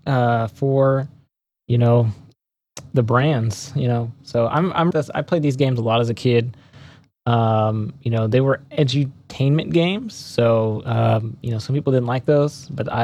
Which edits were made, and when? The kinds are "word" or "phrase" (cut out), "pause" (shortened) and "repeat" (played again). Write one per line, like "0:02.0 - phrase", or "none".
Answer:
0:04.9 - phrase